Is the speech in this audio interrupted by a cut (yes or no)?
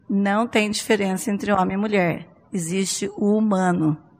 no